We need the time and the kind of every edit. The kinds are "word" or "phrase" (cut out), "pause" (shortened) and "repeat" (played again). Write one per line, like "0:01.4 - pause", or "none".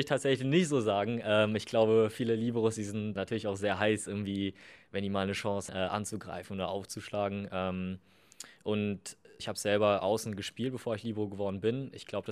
0:03.2 - word
0:05.7 - word
0:09.4 - word